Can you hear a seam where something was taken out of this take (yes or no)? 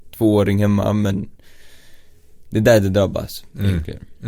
no